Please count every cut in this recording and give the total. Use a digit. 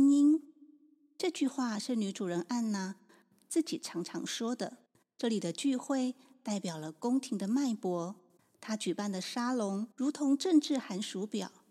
3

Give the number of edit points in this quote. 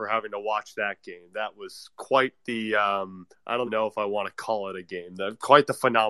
2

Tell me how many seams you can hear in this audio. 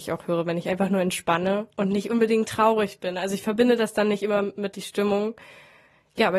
1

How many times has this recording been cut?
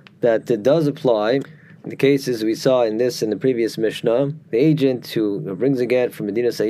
1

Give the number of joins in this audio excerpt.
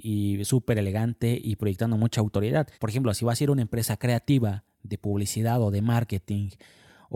1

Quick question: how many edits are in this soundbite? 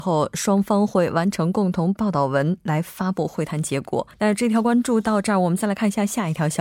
1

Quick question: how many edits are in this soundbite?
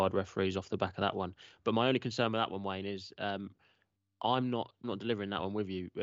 1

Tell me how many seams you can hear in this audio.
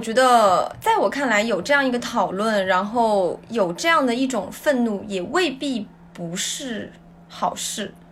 0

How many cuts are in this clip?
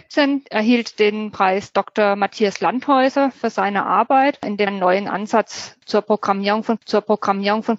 2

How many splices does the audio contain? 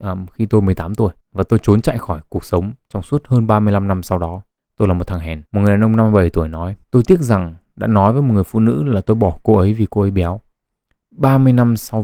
4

